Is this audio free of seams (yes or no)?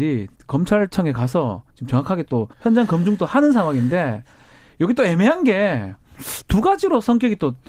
no